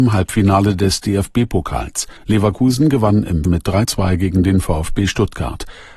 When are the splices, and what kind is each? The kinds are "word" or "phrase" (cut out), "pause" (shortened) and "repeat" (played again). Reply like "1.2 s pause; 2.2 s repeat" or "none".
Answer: 2.2 s pause; 3.4 s word; 3.8 s word